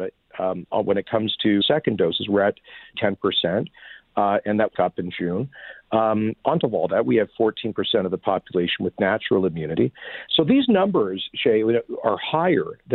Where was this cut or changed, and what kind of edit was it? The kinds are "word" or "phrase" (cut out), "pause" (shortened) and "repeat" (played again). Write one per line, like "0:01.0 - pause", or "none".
0:01.6 - word
0:02.9 - word
0:04.7 - phrase
0:06.6 - word